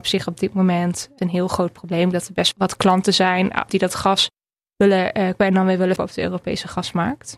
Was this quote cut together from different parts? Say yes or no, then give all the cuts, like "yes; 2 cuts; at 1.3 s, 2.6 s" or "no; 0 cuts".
yes; 5 cuts; at 1.2 s, 2.5 s, 3.7 s, 5.4 s, 6.0 s